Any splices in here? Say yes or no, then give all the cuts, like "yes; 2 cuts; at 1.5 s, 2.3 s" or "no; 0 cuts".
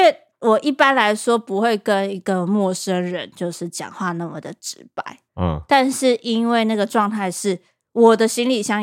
yes; 1 cut; at 5.3 s